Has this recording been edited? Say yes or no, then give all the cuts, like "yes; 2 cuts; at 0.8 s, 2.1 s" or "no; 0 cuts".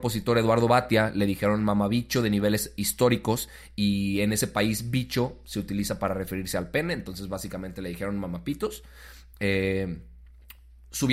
no; 0 cuts